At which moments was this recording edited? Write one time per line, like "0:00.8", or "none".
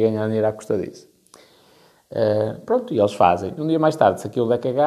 none